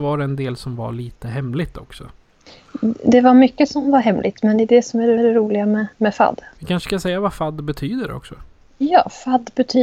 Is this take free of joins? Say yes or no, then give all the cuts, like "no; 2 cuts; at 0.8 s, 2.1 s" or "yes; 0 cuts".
no; 2 cuts; at 5.2 s, 5.9 s